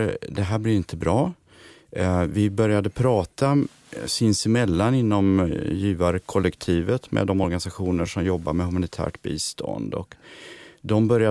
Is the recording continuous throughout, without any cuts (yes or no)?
yes